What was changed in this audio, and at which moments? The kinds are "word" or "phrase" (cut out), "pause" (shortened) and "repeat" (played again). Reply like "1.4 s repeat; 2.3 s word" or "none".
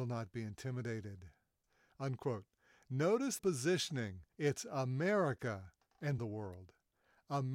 3.4 s word; 4.3 s pause; 6.2 s word